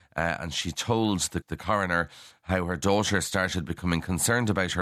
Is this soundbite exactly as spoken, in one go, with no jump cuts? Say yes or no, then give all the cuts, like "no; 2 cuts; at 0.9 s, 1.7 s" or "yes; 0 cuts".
no; 1 cut; at 1.4 s